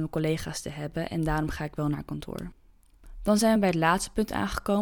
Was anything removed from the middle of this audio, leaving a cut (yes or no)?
no